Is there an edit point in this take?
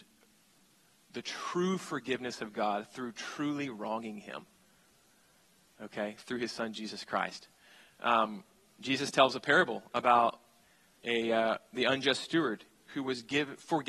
no; 0 cuts

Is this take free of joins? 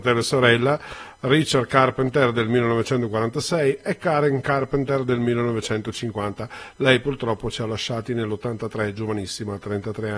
yes; 0 cuts

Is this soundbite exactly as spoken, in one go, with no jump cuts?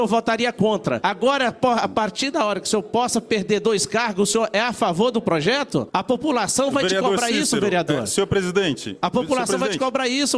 yes; 0 cuts

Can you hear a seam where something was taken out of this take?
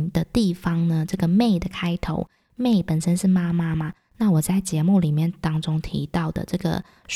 no; 0 cuts

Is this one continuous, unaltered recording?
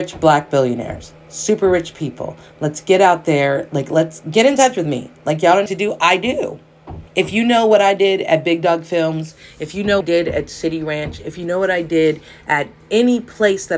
no; 3 cuts; at 5.7 s, 7.1 s, 10.0 s

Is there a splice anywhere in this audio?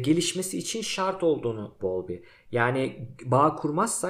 yes; 1 cut; at 1.8 s

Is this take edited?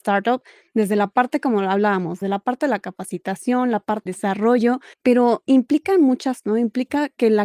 yes; 4 cuts; at 2.2 s, 4.1 s, 4.9 s, 6.4 s

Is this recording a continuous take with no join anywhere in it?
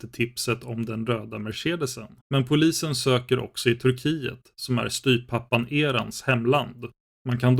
no; 1 cut; at 2.2 s

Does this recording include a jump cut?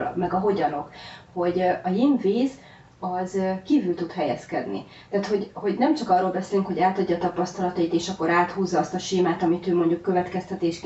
no; 0 cuts

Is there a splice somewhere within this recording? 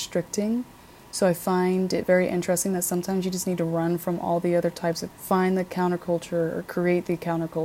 yes; 1 cut; at 5.1 s

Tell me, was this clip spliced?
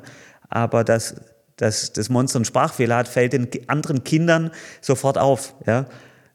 no; 0 cuts

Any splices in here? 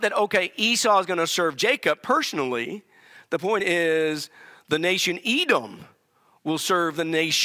no; 0 cuts

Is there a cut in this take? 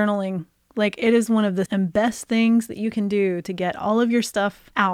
yes; 1 cut; at 1.7 s

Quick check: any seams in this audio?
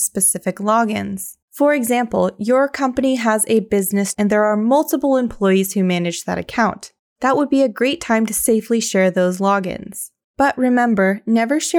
yes; 2 cuts; at 1.4 s, 4.1 s

